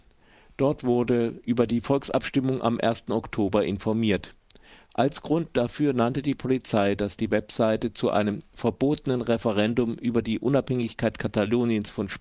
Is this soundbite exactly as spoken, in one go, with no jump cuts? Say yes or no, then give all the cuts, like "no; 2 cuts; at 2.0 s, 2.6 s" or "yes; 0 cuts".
yes; 0 cuts